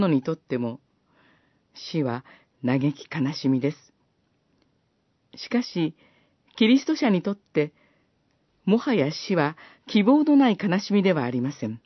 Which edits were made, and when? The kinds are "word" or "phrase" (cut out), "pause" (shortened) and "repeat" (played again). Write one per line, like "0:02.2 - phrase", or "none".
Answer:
none